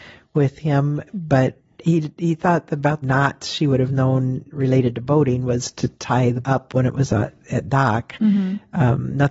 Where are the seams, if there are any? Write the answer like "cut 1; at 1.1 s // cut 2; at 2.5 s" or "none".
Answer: cut 1; at 1.1 s // cut 2; at 3.0 s // cut 3; at 6.4 s